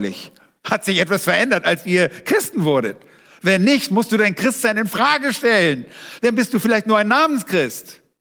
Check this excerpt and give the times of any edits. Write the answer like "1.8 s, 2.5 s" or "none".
none